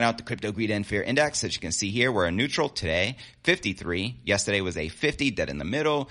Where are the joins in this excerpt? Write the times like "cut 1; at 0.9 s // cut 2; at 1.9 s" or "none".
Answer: none